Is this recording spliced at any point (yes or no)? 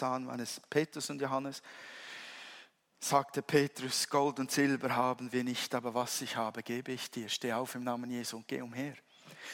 no